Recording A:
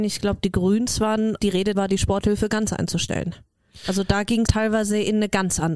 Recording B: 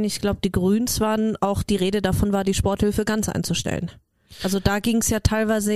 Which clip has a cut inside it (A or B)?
A